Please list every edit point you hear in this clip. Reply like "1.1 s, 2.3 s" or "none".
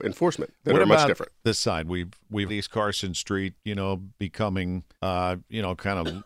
1.5 s, 2.5 s, 3.6 s, 4.9 s